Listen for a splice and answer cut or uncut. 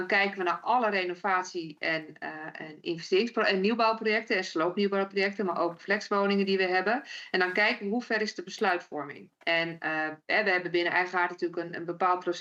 cut